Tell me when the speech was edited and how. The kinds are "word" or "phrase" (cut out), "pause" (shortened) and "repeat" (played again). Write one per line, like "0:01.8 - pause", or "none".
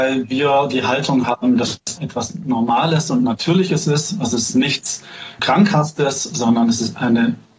0:02.0 - word
0:05.4 - word